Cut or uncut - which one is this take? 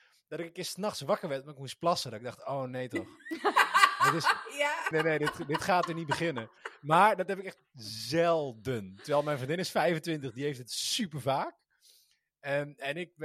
cut